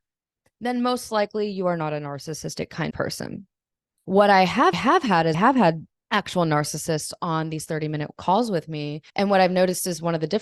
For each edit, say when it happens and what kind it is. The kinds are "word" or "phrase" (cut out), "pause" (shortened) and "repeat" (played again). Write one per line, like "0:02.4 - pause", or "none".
0:02.9 - word
0:03.9 - pause
0:04.7 - repeat
0:05.3 - word
0:05.9 - pause
0:09.1 - pause